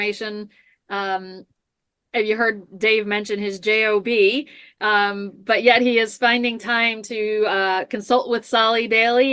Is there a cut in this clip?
no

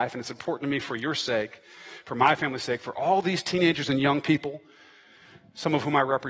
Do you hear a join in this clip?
no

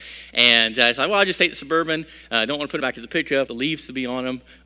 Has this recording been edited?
yes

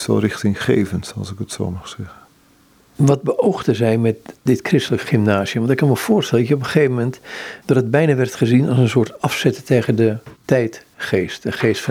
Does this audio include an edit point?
yes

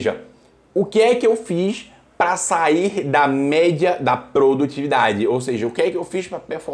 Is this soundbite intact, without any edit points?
yes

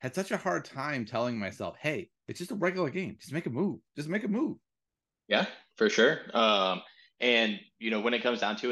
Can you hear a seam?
no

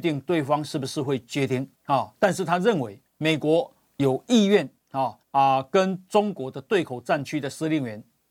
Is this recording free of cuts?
no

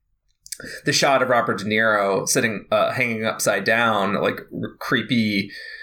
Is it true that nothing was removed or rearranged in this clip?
yes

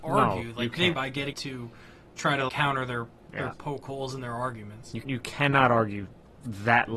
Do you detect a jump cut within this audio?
yes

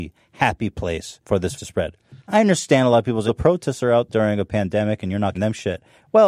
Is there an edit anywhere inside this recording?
yes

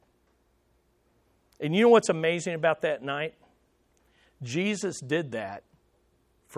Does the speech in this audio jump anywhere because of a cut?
no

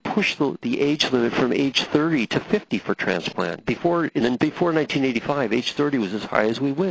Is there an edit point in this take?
no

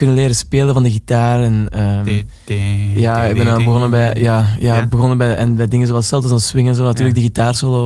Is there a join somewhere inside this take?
no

